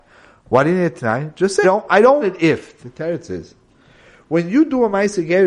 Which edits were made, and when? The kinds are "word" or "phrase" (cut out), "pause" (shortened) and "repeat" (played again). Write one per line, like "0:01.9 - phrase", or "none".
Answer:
0:01.6 - word
0:02.2 - word